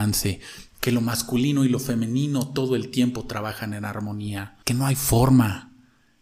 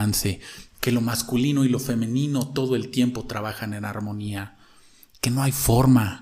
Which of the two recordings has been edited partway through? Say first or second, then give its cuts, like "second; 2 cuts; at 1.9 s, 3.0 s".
first; 1 cut; at 4.6 s